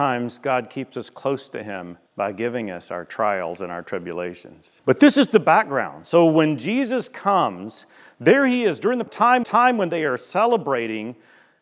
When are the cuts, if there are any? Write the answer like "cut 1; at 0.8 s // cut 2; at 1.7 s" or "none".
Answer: cut 1; at 2.1 s // cut 2; at 4.8 s // cut 3; at 9.1 s // cut 4; at 9.4 s